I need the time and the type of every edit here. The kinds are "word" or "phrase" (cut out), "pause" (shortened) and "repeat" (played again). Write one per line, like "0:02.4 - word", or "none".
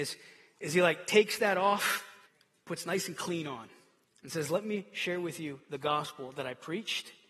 0:02.3 - pause
0:04.0 - pause